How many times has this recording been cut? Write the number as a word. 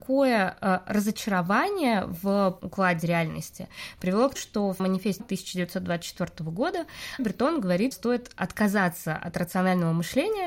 six